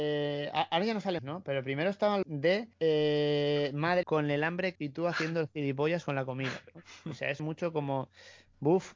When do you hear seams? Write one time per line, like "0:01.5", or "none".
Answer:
0:01.2
0:02.2
0:02.7
0:04.0
0:04.8
0:07.4